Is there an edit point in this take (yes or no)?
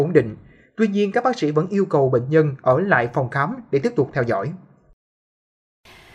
no